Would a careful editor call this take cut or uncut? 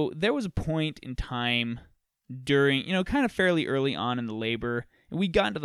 uncut